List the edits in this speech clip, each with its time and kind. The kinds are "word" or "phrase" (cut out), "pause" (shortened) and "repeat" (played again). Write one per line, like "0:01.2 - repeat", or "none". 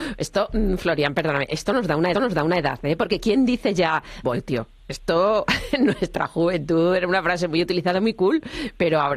0:02.1 - repeat
0:04.2 - phrase